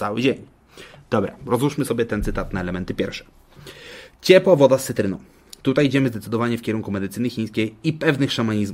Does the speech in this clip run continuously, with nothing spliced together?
yes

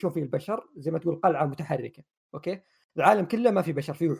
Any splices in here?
no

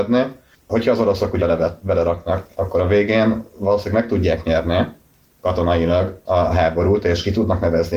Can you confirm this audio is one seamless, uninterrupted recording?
no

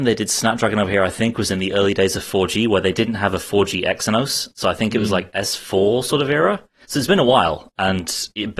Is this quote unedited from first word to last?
yes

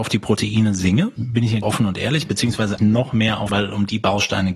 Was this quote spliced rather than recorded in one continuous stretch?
yes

